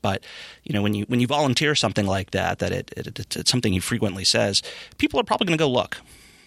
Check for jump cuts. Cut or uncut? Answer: cut